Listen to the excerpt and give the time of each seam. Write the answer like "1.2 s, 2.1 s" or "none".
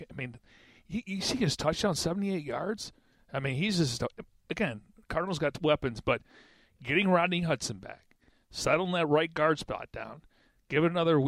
none